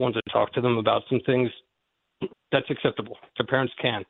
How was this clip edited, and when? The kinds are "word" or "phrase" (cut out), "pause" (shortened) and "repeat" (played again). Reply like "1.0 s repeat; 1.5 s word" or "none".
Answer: 2.3 s pause